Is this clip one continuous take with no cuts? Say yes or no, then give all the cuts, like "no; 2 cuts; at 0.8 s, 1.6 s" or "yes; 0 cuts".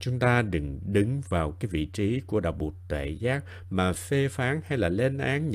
yes; 0 cuts